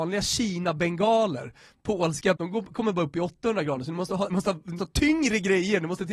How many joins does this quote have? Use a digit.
3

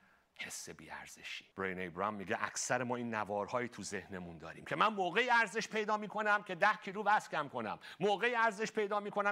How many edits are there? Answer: 1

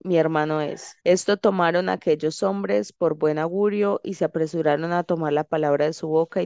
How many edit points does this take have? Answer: 1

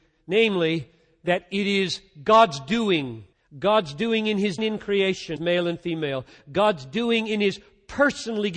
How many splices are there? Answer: 3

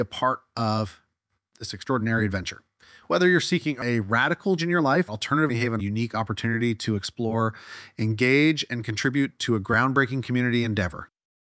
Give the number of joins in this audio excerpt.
4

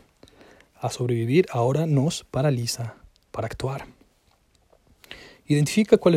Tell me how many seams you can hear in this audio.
0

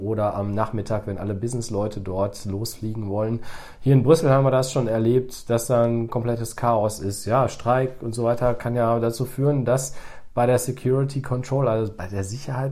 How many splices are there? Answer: 0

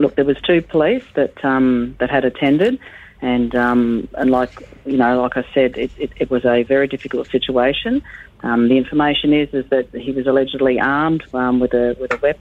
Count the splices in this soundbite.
0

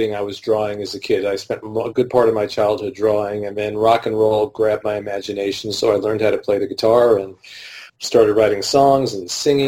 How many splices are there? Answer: 1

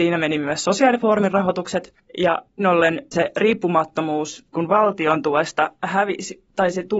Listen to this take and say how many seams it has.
3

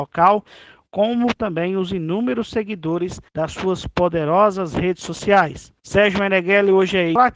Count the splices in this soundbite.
2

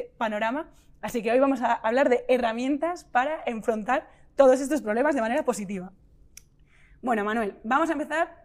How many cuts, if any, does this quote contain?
0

